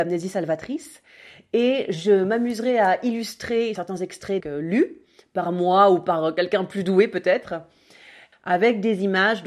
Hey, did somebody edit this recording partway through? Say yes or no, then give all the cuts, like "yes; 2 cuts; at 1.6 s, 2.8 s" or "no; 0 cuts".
yes; 2 cuts; at 3.8 s, 4.4 s